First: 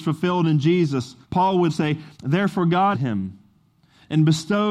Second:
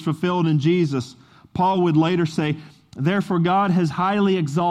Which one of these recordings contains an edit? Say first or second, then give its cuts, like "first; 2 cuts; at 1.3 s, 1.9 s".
first; 4 cuts; at 1.2 s, 1.7 s, 2.1 s, 2.9 s